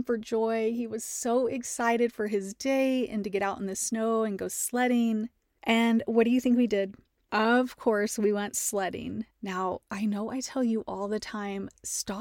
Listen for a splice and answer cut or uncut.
cut